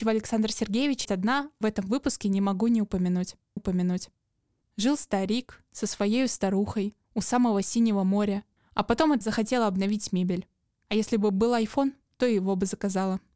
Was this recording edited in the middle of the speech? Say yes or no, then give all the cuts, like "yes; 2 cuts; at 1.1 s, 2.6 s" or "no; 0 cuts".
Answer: yes; 6 cuts; at 1.0 s, 1.6 s, 3.6 s, 7.0 s, 8.6 s, 9.2 s